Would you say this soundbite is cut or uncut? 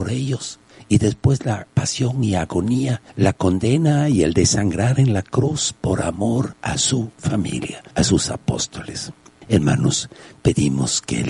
uncut